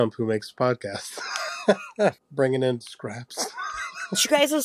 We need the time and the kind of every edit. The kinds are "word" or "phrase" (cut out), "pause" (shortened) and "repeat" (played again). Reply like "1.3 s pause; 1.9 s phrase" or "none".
2.2 s pause; 2.8 s word